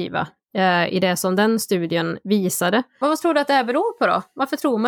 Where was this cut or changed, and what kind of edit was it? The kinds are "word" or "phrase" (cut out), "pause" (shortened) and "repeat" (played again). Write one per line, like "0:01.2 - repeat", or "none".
none